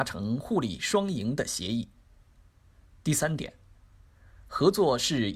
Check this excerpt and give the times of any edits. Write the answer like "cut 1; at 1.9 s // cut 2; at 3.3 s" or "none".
none